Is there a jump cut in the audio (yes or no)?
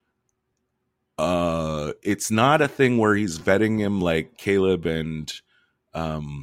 no